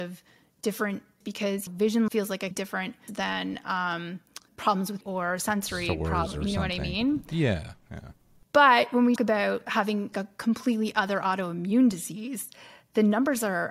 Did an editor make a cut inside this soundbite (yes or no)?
yes